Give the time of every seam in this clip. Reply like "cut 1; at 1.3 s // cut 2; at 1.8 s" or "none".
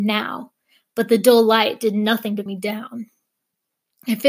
cut 1; at 2.5 s